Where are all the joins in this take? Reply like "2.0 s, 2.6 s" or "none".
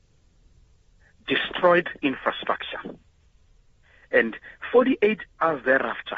2.0 s

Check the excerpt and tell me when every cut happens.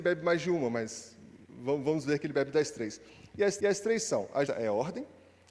3.6 s, 4.5 s

